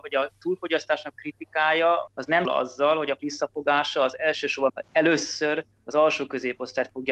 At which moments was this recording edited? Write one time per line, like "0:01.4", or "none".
0:01.1
0:02.1
0:02.4
0:03.2
0:04.7